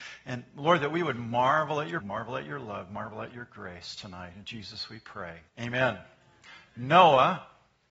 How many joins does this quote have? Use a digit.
2